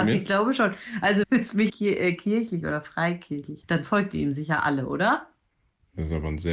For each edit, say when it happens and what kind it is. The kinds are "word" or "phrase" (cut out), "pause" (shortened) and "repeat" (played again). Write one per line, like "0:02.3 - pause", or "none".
0:01.2 - word
0:01.7 - word
0:03.6 - word